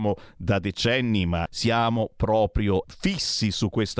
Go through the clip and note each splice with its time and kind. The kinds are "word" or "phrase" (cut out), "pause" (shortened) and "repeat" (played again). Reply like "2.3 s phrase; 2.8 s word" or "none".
1.5 s word; 2.8 s word